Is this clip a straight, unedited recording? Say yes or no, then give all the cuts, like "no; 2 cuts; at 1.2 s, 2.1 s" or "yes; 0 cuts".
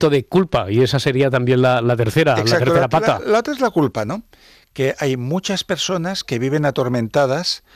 yes; 0 cuts